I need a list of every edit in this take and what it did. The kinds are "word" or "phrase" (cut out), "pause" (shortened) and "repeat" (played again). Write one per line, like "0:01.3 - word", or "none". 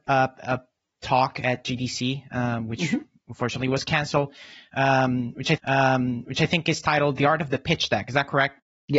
0:05.6 - repeat